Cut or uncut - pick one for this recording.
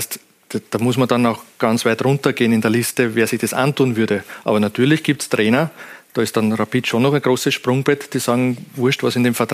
uncut